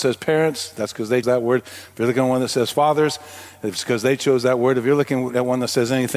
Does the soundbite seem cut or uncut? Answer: cut